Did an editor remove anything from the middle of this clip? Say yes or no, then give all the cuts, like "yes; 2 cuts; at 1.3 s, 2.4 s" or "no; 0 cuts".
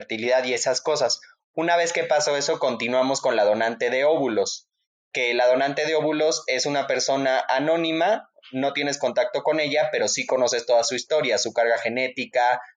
no; 0 cuts